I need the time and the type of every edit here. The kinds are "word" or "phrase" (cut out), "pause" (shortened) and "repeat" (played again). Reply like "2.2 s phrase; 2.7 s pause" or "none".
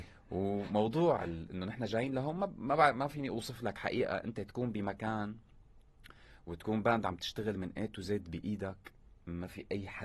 none